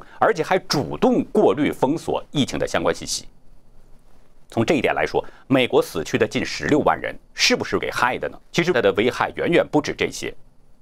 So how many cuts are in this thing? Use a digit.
4